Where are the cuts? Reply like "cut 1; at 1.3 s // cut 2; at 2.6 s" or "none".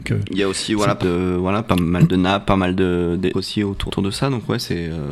cut 1; at 1.0 s // cut 2; at 3.3 s // cut 3; at 3.9 s